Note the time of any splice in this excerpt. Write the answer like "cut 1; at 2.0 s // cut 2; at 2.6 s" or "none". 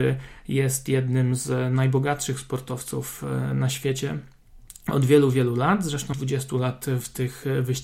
cut 1; at 6.1 s